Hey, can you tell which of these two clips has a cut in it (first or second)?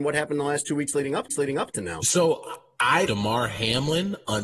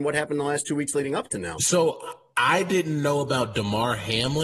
first